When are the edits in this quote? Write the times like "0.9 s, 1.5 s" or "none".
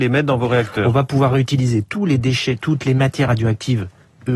none

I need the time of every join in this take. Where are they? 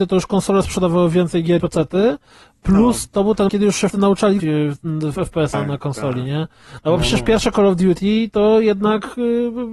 1.6 s, 3.5 s, 3.9 s, 4.4 s, 5.1 s, 5.5 s

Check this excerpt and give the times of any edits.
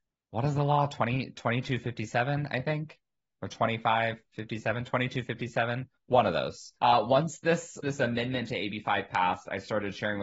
6.8 s, 7.8 s

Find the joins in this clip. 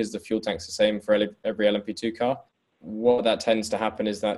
none

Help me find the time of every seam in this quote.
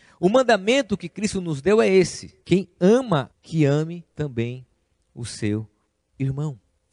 2.4 s, 3.3 s, 4.1 s

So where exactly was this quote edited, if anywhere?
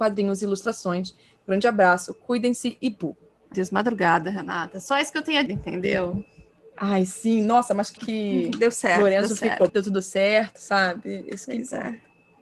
3.5 s, 5.5 s, 8.0 s, 9.7 s

